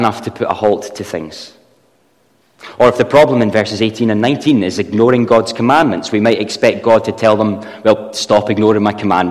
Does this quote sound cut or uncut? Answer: uncut